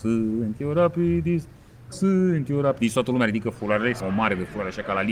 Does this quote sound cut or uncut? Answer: cut